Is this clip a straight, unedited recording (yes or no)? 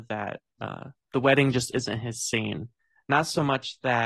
yes